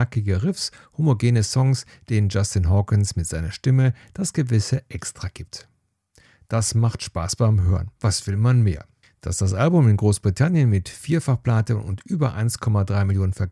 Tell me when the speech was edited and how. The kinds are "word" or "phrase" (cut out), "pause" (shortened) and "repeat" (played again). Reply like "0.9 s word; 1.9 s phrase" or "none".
8.0 s pause; 9.0 s pause